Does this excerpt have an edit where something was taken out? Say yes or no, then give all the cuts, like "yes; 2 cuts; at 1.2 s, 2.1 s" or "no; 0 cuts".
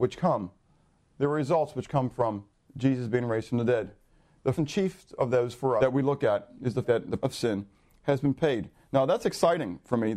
yes; 5 cuts; at 2.7 s, 4.5 s, 5.8 s, 6.8 s, 7.2 s